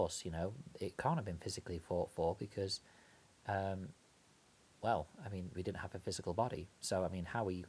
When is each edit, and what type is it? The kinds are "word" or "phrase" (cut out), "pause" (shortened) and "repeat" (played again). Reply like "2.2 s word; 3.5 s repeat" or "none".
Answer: none